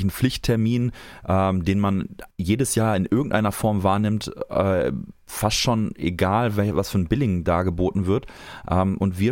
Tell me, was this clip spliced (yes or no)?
yes